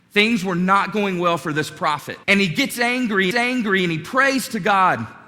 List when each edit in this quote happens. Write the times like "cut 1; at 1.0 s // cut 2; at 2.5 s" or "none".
cut 1; at 2.2 s // cut 2; at 3.3 s